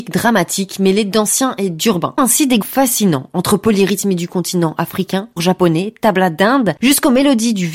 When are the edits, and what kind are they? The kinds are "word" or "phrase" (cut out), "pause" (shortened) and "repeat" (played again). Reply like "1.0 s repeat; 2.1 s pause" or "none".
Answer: 2.2 s word; 2.6 s word; 5.4 s word

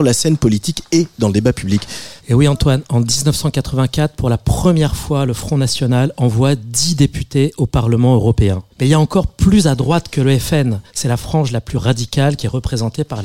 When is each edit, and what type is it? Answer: 2.2 s pause; 8.7 s pause; 10.9 s pause

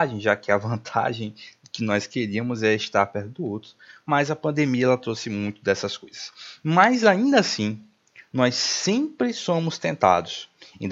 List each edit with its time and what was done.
none

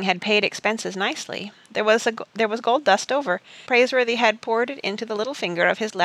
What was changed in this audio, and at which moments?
3.1 s word; 3.7 s word

